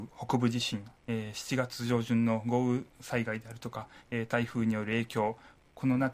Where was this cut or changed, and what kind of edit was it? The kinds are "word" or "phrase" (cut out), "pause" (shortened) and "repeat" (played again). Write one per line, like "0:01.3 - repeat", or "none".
0:01.0 - pause